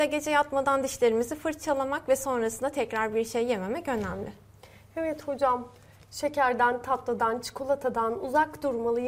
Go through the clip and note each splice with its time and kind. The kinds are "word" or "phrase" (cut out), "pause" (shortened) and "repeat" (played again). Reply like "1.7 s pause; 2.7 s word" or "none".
none